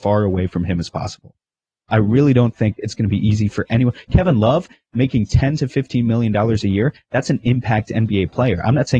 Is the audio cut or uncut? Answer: uncut